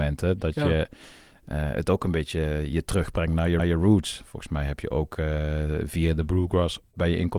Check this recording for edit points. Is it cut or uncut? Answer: cut